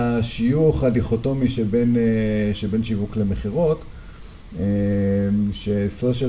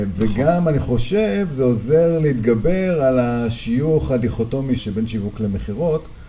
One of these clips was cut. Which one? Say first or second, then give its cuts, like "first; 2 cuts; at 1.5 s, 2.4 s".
second; 1 cut; at 4.8 s